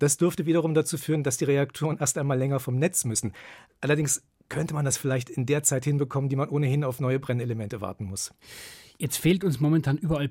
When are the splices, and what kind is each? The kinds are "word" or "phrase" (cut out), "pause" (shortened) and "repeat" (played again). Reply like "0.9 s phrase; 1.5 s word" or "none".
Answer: none